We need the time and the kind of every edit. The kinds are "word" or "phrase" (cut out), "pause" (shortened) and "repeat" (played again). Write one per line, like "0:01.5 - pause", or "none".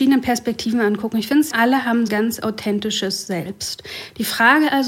0:01.5 - word
0:02.1 - phrase